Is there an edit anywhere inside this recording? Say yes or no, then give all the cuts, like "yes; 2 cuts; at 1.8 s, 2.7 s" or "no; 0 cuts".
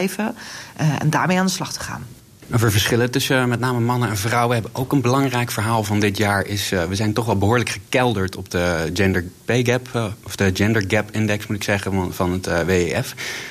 no; 0 cuts